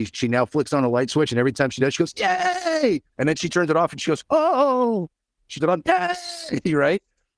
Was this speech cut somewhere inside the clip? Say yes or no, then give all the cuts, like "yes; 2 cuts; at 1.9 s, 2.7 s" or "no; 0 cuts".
yes; 2 cuts; at 3.1 s, 5.6 s